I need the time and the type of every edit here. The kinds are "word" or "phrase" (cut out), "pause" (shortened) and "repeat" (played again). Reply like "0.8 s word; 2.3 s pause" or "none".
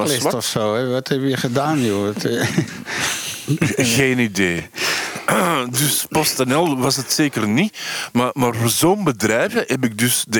none

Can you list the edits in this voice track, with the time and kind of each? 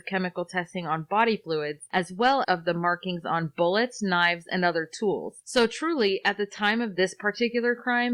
2.4 s phrase

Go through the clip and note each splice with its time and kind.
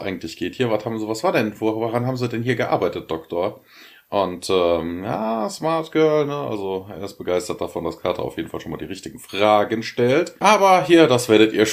none

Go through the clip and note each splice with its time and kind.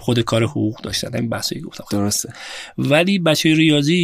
none

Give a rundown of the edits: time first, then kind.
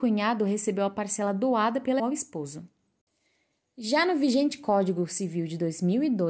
2.0 s word

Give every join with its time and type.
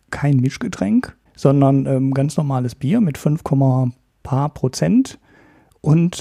none

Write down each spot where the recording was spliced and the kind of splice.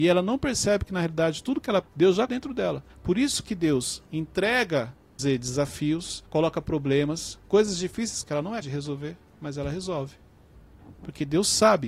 1.8 s word; 2.3 s word; 2.9 s pause; 5.2 s word; 6.3 s pause; 8.2 s phrase; 8.6 s word

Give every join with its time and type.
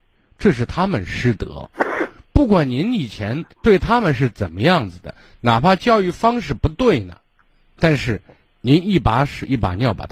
3.5 s pause

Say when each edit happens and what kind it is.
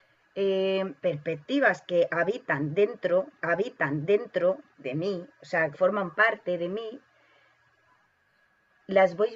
1.0 s pause; 3.4 s repeat; 5.7 s phrase

